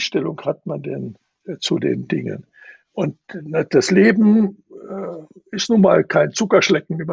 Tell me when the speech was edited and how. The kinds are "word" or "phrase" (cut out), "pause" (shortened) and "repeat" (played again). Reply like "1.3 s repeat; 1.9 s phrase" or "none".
3.2 s pause